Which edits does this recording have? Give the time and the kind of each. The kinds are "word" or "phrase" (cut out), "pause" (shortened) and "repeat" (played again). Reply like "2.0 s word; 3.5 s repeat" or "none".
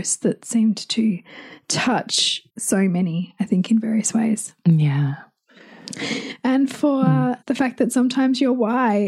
2.5 s pause; 7.4 s pause

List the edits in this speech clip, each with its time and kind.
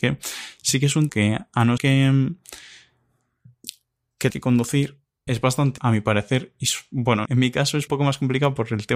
1.1 s word; 1.8 s word; 4.3 s word; 5.3 s word; 5.8 s word; 7.3 s word; 7.9 s word

